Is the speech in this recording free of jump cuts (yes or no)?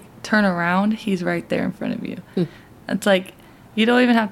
yes